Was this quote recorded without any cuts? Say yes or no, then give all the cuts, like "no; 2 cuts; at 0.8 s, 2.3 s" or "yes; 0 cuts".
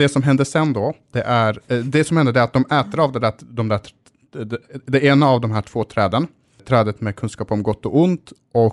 no; 1 cut; at 6.6 s